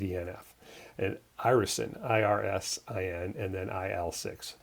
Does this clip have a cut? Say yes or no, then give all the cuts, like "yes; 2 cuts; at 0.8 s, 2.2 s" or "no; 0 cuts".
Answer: no; 0 cuts